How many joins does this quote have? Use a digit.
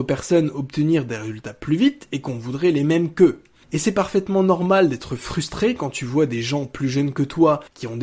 0